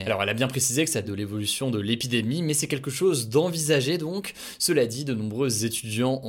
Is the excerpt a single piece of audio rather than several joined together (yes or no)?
no